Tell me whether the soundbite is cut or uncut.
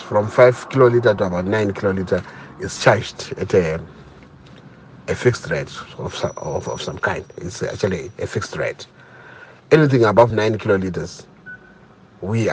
uncut